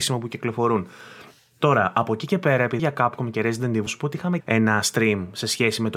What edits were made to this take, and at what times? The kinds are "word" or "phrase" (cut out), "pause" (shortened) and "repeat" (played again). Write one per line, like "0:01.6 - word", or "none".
0:02.8 - word
0:03.9 - word
0:04.4 - word